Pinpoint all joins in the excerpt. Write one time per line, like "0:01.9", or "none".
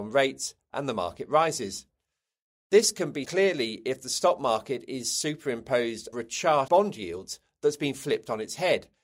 0:03.2
0:06.1
0:06.7